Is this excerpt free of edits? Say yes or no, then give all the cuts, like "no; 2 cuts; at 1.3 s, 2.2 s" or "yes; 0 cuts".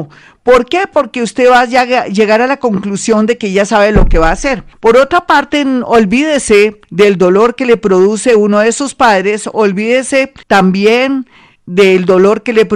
no; 3 cuts; at 4.7 s, 6.8 s, 10.4 s